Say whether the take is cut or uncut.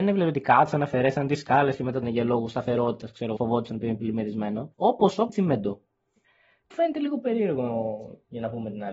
cut